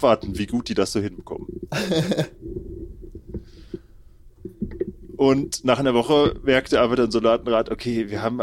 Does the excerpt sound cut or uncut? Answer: uncut